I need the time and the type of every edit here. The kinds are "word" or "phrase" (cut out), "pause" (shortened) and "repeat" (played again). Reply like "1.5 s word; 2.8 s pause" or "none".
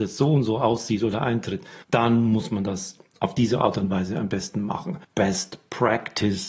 1.8 s pause; 5.0 s pause